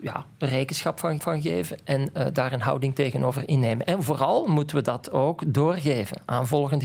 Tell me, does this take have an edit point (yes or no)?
yes